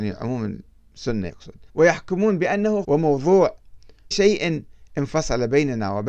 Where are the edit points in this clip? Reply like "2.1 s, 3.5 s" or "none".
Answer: 1.3 s, 1.7 s, 2.8 s, 4.1 s